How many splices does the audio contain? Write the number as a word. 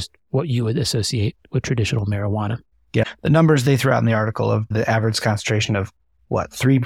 two